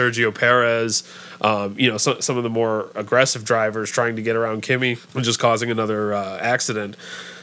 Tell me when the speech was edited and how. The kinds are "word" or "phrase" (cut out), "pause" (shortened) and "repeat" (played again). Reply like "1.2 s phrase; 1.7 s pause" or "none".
none